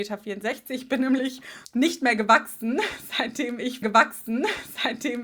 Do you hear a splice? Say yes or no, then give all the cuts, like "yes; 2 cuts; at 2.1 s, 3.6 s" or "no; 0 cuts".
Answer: yes; 1 cut; at 3.8 s